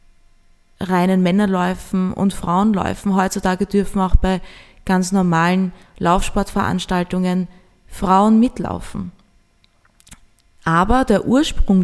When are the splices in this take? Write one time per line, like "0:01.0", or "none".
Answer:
none

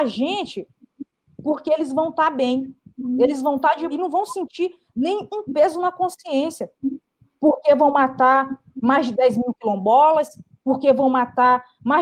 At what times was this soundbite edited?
0:03.9

